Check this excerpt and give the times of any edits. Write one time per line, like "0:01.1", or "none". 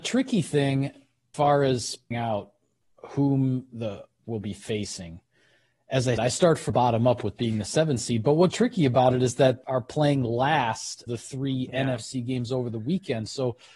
0:01.3
0:02.1
0:04.2
0:06.2
0:06.7
0:07.4
0:08.5
0:09.6
0:11.1